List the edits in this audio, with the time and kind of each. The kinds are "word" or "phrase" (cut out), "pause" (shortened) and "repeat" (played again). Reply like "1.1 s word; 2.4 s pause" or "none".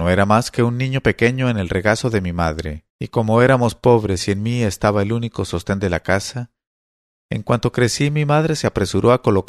2.9 s pause